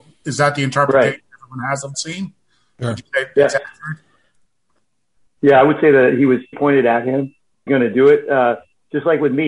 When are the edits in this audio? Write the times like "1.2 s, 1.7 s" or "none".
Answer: 1.9 s, 6.5 s, 7.7 s